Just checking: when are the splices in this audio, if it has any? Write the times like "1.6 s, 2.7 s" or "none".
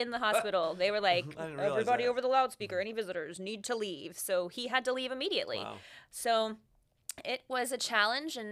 none